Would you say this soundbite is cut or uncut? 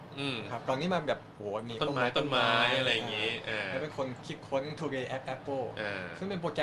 uncut